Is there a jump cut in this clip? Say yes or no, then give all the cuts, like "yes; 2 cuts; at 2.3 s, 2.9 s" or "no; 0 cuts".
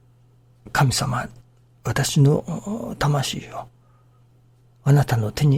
no; 0 cuts